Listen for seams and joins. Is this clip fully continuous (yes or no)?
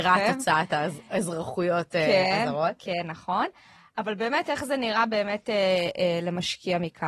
yes